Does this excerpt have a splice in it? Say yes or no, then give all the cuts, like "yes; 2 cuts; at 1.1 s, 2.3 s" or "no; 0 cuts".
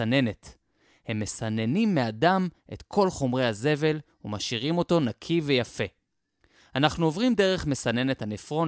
no; 0 cuts